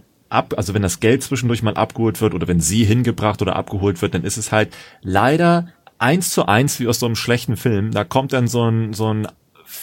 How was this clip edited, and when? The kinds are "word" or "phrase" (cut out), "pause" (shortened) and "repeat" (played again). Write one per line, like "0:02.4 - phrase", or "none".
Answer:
0:05.8 - pause